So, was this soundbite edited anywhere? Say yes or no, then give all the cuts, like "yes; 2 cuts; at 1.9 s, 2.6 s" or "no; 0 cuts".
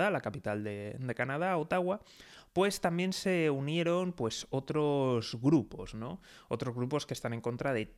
no; 0 cuts